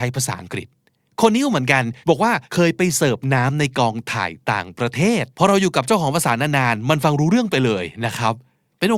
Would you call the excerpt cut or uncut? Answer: cut